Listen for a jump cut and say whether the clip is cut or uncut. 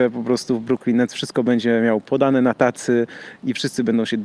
uncut